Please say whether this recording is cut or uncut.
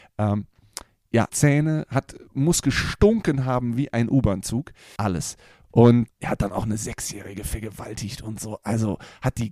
cut